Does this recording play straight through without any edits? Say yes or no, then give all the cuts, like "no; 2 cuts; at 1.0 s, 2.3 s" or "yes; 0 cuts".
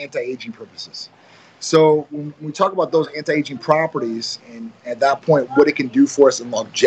no; 1 cut; at 4.4 s